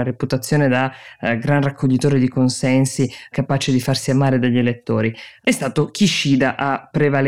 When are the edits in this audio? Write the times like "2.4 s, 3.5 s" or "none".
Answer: none